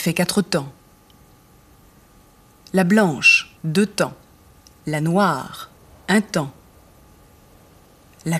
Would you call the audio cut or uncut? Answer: cut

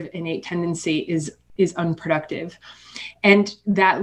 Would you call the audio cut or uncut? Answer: uncut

